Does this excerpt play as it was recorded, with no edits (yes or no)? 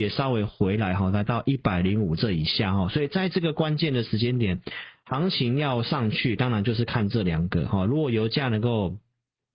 yes